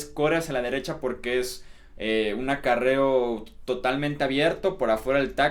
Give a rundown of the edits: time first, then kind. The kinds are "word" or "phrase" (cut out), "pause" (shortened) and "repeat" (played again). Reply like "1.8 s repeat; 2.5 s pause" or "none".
none